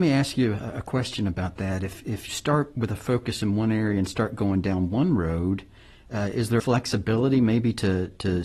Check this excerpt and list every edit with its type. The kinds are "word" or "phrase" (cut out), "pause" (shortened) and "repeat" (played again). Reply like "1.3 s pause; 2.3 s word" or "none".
2.3 s word; 6.6 s word